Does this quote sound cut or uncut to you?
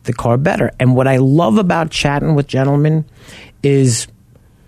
cut